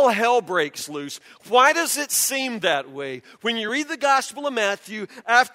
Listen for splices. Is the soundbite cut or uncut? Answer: uncut